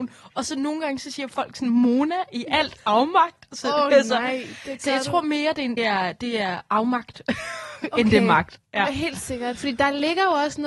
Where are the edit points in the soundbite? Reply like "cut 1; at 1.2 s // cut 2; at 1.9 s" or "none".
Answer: cut 1; at 5.8 s